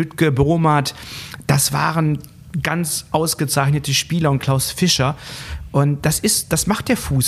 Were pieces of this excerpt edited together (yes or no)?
yes